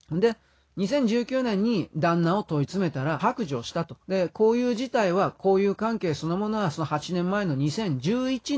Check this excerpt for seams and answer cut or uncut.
cut